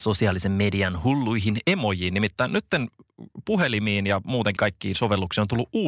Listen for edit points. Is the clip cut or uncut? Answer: cut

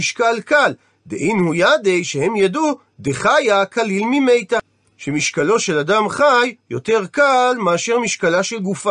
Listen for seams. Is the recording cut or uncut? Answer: uncut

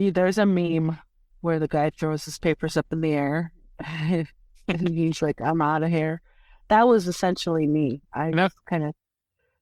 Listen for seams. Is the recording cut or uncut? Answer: uncut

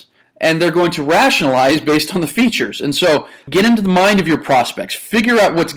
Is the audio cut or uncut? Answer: uncut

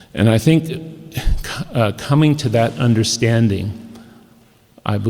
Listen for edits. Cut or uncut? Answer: uncut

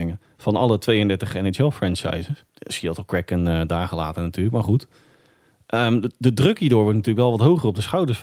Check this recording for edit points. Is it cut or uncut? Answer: cut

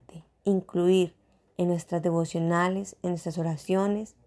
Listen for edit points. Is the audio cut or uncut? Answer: uncut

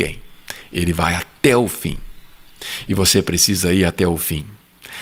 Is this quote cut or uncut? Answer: uncut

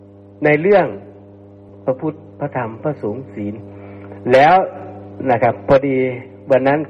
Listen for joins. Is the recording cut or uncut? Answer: cut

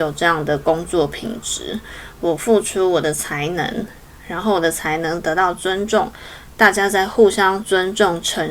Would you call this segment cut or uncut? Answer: uncut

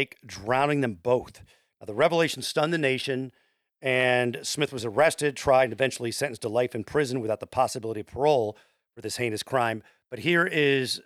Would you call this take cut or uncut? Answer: uncut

